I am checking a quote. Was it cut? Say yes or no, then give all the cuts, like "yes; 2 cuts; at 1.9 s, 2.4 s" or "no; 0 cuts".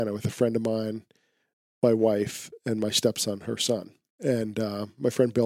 no; 0 cuts